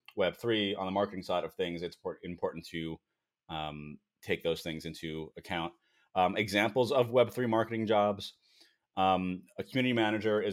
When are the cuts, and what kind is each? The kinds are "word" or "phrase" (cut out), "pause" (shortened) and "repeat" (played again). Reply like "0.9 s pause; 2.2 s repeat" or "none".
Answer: none